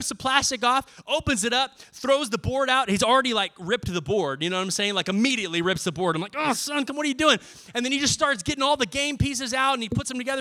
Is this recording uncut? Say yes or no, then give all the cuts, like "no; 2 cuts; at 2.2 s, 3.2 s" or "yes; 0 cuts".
yes; 0 cuts